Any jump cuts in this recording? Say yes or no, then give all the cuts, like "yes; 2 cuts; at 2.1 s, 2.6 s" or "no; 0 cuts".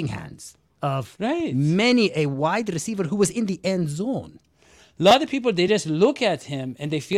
no; 0 cuts